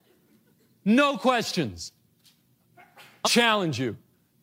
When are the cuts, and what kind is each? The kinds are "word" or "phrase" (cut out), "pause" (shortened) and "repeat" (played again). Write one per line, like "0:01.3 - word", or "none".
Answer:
0:03.2 - word